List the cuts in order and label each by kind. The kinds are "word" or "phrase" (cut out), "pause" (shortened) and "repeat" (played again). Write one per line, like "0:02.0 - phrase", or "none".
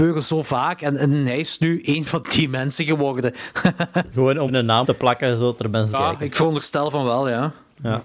0:02.2 - word
0:04.1 - word
0:04.5 - word
0:04.8 - word
0:05.9 - word